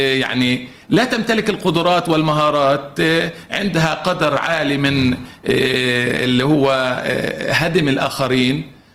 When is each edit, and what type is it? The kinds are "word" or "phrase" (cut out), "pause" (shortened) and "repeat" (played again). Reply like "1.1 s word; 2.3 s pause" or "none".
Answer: none

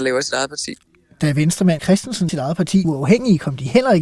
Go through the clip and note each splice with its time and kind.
1.8 s word; 2.3 s word; 2.8 s word

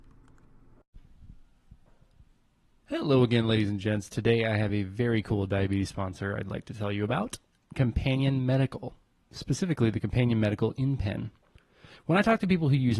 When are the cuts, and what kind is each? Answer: none

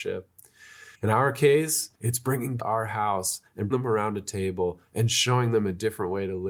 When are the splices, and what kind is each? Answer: 0.9 s pause; 1.9 s pause; 2.6 s phrase; 3.7 s word

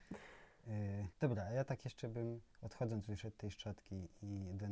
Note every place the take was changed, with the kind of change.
1.1 s pause; 2.5 s pause

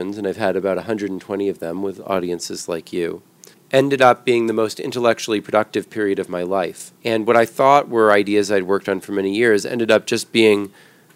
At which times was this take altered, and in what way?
3.5 s pause; 7.0 s pause

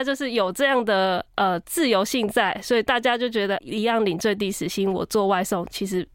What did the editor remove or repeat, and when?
3.6 s phrase

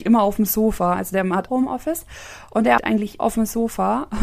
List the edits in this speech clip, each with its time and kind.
1.5 s word; 2.8 s word; 3.2 s word

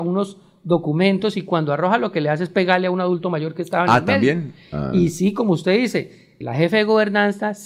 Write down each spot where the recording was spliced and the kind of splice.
6.4 s word

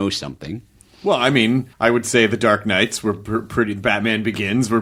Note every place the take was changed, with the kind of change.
1.7 s pause

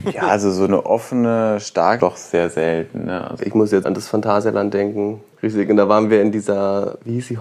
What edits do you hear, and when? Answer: 2.0 s word; 3.4 s word; 3.8 s word

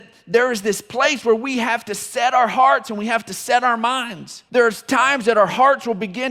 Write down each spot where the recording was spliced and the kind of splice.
4.5 s pause

